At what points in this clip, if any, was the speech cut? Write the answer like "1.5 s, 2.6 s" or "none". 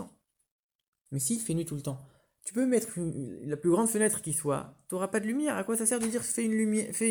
none